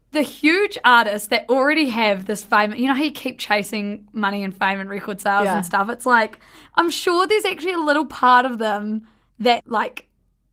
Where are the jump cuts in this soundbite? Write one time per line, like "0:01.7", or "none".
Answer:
0:09.6